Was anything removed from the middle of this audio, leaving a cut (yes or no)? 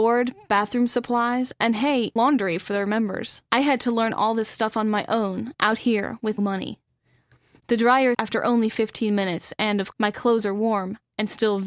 yes